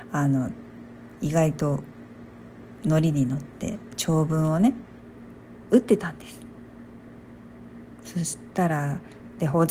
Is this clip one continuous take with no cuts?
yes; 0 cuts

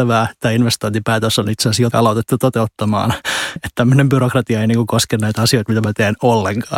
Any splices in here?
yes; 2 cuts; at 1.9 s, 3.6 s

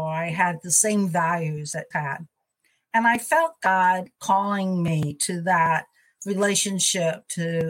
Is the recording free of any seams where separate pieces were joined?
no; 1 cut; at 1.9 s

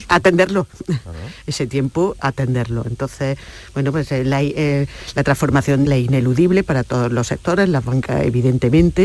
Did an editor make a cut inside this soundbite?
yes; 2 cuts; at 2.2 s, 5.9 s

